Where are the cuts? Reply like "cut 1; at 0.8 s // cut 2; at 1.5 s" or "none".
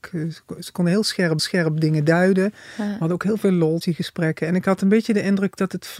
cut 1; at 1.4 s // cut 2; at 3.8 s